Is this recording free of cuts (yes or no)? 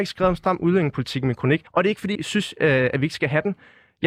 no